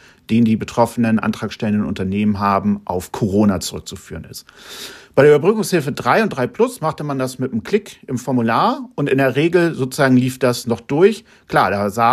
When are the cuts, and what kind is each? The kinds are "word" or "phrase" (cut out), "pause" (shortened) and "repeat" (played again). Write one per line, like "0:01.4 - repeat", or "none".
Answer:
none